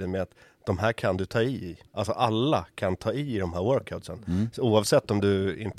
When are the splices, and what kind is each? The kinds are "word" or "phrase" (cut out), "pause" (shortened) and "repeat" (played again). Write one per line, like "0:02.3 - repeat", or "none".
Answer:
0:01.9 - pause